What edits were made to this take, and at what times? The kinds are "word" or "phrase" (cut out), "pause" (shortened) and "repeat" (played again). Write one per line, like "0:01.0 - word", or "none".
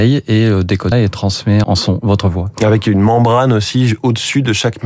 0:00.9 - word
0:01.6 - word